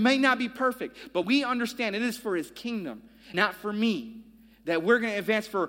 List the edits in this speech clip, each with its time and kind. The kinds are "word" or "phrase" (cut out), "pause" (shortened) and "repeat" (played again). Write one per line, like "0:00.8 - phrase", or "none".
0:01.2 - word
0:03.3 - word